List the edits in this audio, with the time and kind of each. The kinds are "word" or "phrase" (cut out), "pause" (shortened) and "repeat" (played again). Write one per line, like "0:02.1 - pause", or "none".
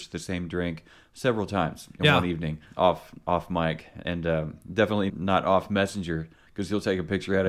0:05.1 - word